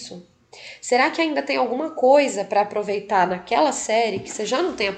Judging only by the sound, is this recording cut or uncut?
uncut